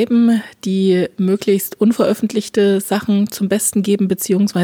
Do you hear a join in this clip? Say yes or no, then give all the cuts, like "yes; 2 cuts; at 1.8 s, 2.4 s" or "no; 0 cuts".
no; 0 cuts